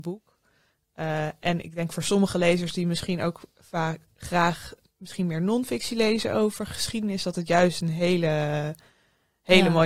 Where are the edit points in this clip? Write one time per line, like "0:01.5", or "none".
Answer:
none

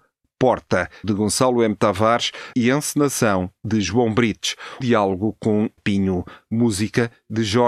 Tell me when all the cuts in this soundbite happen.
0:01.0
0:02.5
0:04.8
0:05.8

